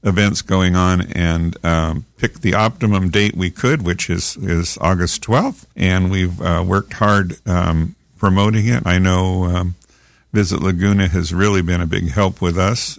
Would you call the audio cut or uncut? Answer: cut